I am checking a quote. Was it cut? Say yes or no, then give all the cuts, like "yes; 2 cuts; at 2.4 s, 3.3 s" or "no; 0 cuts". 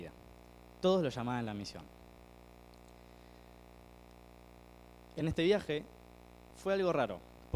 no; 0 cuts